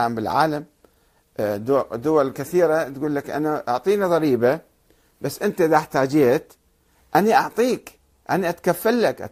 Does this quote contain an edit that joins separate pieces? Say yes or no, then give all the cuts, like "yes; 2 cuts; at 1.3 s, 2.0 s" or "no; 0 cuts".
no; 0 cuts